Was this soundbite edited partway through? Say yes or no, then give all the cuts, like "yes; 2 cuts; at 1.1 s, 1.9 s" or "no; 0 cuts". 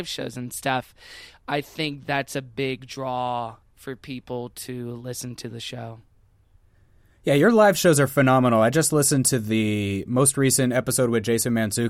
no; 0 cuts